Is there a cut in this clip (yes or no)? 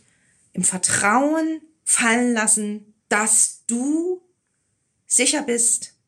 yes